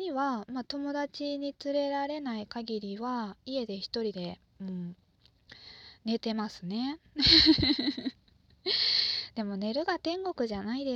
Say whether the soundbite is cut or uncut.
cut